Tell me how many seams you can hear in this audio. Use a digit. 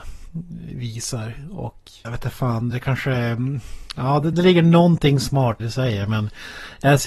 4